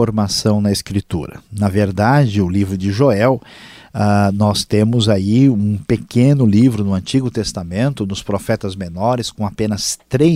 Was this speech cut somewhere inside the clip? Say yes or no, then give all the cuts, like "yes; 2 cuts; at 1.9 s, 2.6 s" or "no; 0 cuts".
no; 0 cuts